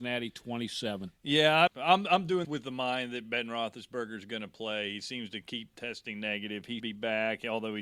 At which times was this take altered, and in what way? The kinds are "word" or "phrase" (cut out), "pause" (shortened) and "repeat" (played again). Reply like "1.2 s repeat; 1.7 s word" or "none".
1.7 s word; 2.4 s word; 6.8 s word